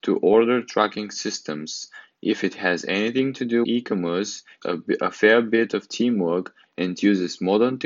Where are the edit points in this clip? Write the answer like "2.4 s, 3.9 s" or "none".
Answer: 3.6 s, 4.6 s